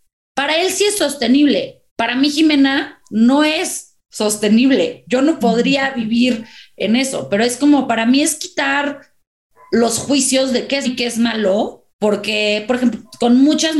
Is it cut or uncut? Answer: cut